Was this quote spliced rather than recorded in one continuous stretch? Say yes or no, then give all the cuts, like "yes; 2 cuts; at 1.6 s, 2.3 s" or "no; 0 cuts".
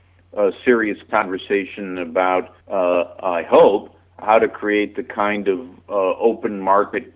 yes; 1 cut; at 2.6 s